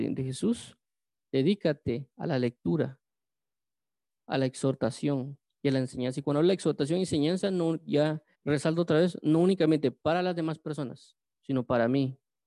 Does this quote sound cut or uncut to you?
cut